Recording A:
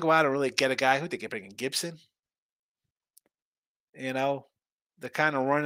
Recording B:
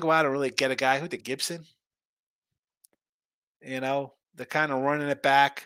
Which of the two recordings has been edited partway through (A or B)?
B